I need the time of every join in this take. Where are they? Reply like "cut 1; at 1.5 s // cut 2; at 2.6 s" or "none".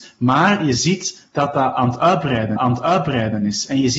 cut 1; at 2.6 s